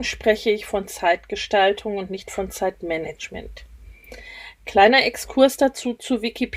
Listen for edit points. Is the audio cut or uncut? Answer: uncut